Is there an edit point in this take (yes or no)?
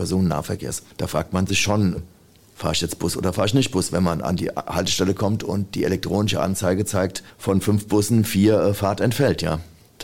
no